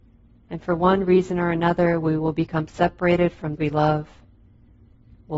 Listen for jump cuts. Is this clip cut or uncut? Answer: cut